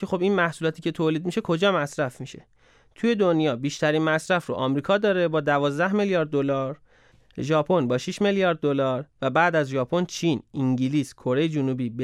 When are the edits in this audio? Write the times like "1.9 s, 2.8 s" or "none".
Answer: none